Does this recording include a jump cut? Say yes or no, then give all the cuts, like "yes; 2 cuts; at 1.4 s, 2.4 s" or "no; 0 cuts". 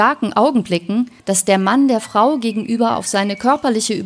yes; 1 cut; at 1.2 s